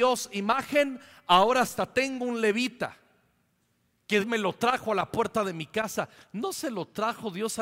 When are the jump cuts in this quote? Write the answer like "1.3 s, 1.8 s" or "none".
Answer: 4.2 s